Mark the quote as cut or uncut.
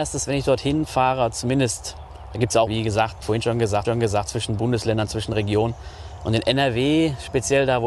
cut